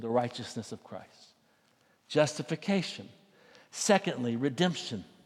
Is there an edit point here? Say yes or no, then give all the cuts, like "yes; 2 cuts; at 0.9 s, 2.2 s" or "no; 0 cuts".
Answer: no; 0 cuts